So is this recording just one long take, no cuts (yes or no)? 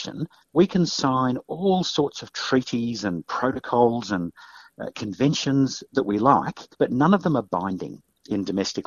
no